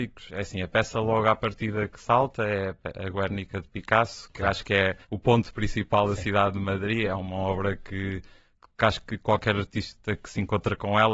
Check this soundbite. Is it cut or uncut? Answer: cut